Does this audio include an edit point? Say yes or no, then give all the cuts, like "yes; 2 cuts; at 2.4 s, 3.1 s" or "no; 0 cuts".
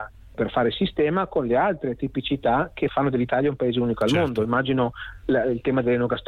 no; 0 cuts